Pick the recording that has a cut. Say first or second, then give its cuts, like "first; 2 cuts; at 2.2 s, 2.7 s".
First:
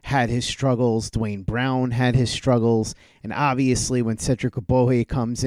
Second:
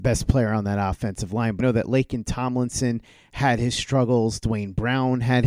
second; 1 cut; at 1.6 s